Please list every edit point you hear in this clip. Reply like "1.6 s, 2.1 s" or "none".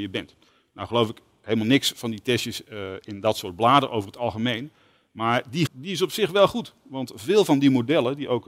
5.7 s